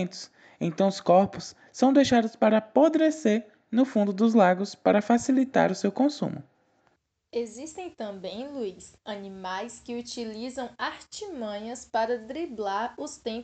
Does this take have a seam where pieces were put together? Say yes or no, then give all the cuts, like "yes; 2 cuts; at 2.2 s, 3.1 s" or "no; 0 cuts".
yes; 2 cuts; at 7.0 s, 9.0 s